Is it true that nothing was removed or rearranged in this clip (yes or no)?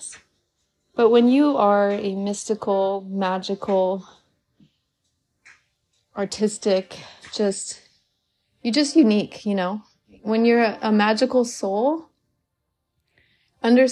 yes